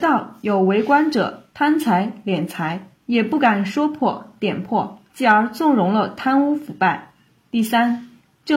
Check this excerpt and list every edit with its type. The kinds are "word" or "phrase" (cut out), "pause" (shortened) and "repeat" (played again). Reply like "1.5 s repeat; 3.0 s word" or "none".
1.5 s pause; 3.0 s pause; 5.1 s pause; 7.3 s pause